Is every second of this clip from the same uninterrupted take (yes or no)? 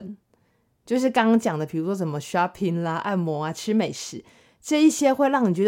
yes